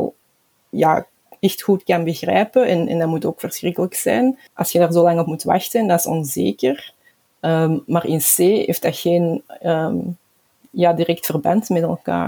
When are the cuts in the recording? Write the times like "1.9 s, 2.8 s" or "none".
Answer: 4.5 s

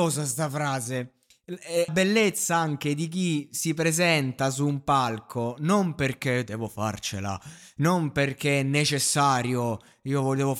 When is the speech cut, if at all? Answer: 1.9 s

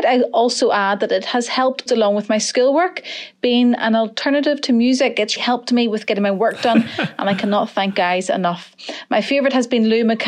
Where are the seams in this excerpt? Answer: 1.9 s, 5.4 s, 7.9 s

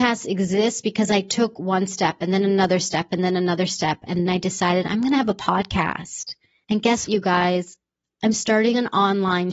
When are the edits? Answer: 4.3 s, 7.1 s

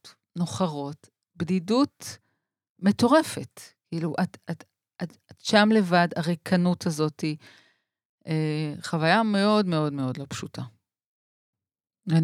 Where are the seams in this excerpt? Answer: none

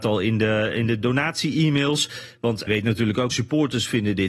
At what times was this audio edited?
1.0 s, 2.7 s, 3.3 s

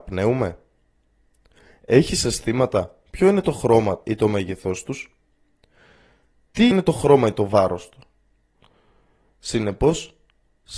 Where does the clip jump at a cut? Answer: 4.0 s, 6.7 s

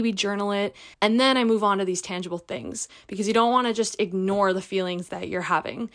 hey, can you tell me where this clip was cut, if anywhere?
0.9 s

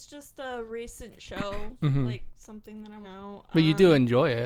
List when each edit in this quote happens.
3.0 s

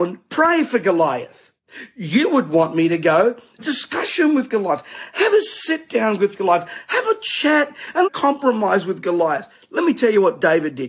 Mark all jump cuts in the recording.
3.6 s, 8.0 s

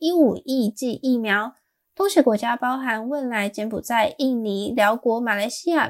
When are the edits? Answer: none

